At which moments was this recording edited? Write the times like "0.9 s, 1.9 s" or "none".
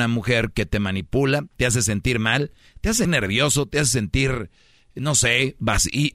3.0 s